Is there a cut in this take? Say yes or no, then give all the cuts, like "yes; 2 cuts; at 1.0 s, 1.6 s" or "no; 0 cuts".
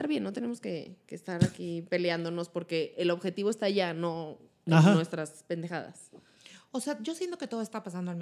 no; 0 cuts